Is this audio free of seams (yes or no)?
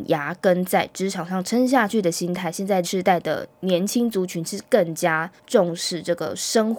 no